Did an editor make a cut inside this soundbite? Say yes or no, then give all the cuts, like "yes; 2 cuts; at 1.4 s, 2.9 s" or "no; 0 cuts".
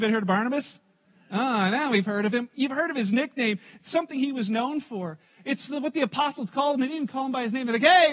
no; 0 cuts